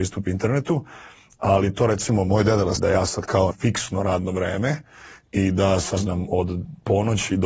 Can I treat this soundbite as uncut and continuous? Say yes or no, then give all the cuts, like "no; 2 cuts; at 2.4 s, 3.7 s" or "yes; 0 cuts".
no; 3 cuts; at 2.8 s, 3.5 s, 6.0 s